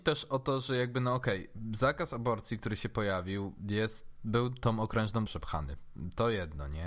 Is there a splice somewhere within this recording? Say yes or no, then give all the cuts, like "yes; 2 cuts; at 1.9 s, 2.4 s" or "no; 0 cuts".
yes; 1 cut; at 5.3 s